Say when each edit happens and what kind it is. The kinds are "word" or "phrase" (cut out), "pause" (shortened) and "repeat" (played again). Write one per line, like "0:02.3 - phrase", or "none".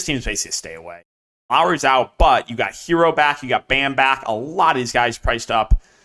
none